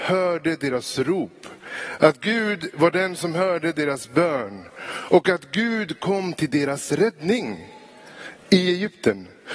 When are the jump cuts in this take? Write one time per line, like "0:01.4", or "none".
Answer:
none